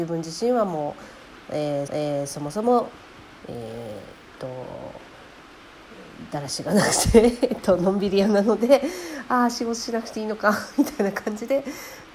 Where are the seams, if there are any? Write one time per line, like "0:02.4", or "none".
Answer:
0:01.9